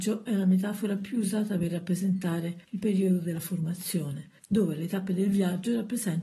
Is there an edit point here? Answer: yes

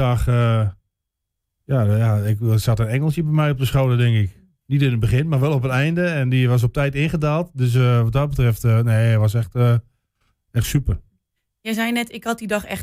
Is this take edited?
no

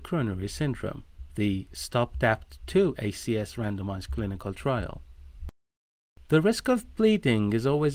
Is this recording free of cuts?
yes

